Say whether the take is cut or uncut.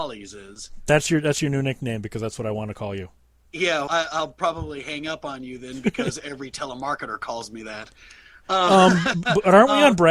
cut